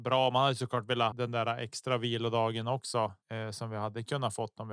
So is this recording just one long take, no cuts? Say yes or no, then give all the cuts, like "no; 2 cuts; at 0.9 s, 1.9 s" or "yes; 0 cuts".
no; 2 cuts; at 1.1 s, 3.2 s